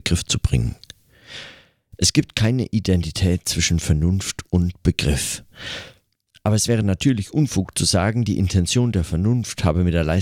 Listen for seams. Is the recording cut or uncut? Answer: uncut